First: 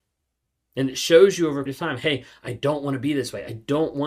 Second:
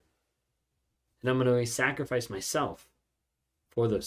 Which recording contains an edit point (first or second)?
first